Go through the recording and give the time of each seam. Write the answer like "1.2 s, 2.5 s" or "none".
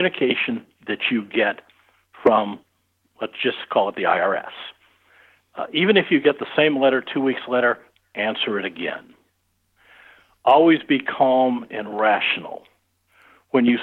none